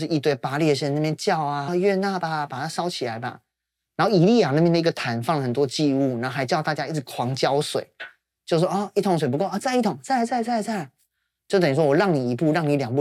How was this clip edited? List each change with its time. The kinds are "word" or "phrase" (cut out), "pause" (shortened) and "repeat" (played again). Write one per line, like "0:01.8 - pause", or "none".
0:01.7 - phrase